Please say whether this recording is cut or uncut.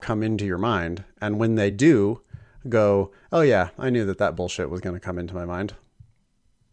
uncut